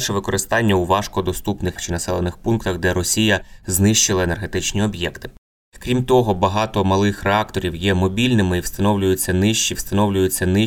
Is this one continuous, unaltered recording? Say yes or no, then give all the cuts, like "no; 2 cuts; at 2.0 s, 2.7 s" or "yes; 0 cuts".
no; 2 cuts; at 1.8 s, 9.7 s